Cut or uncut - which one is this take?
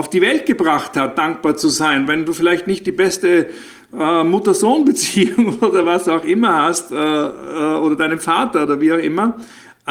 uncut